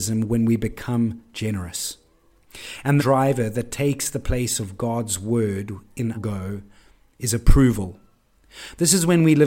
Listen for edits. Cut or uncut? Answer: cut